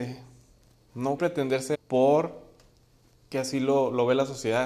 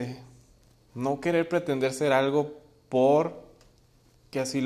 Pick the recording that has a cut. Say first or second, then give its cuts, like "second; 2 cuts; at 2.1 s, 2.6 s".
first; 2 cuts; at 1.2 s, 1.7 s